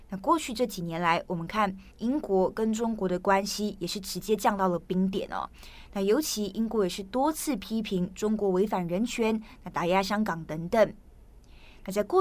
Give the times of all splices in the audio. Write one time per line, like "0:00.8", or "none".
0:01.9